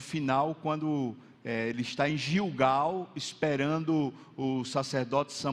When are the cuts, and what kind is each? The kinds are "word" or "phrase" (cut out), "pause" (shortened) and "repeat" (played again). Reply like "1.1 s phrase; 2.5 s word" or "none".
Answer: none